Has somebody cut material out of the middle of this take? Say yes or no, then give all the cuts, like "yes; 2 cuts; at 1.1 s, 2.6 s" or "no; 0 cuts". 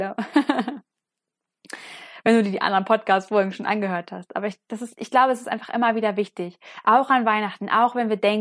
no; 0 cuts